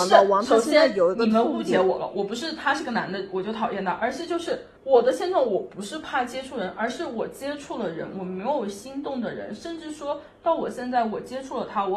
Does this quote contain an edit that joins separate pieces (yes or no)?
yes